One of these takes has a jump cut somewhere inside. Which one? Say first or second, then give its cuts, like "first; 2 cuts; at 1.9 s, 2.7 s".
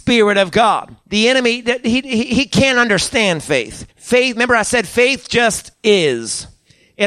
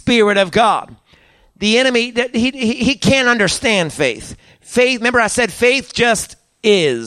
first; 3 cuts; at 1.0 s, 3.9 s, 5.7 s